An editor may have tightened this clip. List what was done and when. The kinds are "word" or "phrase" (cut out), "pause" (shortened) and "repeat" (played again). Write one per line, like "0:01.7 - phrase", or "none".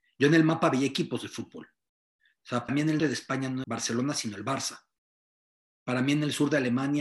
0:02.7 - word
0:03.0 - word
0:03.6 - word